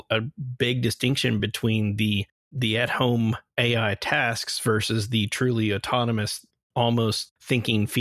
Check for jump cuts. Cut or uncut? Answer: uncut